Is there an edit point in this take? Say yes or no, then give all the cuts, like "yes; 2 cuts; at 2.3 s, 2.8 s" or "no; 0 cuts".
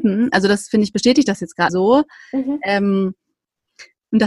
yes; 1 cut; at 1.7 s